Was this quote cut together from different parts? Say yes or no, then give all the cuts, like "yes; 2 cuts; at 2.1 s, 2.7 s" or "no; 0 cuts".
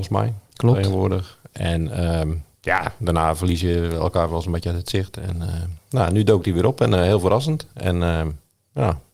no; 0 cuts